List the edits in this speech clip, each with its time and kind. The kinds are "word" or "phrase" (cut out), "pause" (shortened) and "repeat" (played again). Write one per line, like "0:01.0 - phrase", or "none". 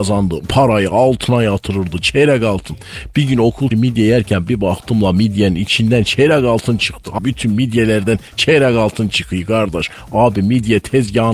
0:03.7 - word
0:07.2 - word